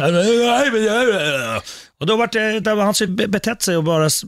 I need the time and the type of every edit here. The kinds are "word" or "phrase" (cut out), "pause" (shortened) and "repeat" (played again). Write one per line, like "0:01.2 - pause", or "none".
0:02.6 - word
0:03.1 - word

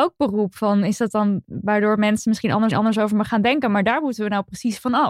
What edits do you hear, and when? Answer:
0:01.4 - word
0:02.7 - repeat

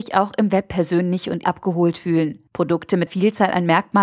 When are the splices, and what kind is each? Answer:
0:01.4 - word
0:02.5 - pause
0:03.1 - word

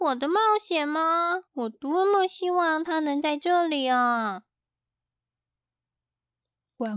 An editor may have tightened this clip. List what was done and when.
0:01.5 - pause

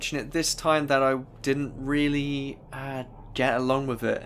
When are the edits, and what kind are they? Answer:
0:02.6 - pause

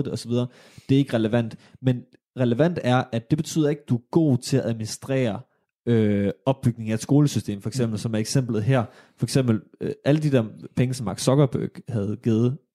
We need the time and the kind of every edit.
none

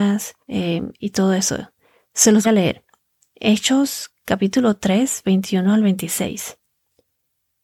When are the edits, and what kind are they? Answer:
0:02.4 - word
0:05.2 - word

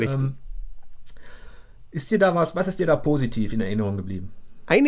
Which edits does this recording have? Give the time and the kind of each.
none

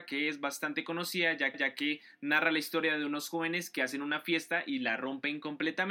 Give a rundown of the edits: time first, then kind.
0:01.5 - repeat

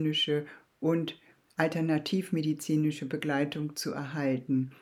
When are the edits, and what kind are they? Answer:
none

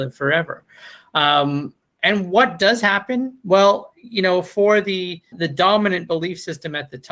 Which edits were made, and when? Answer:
0:05.3 - word

